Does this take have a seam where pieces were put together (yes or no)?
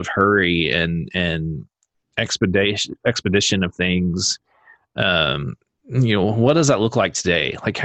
no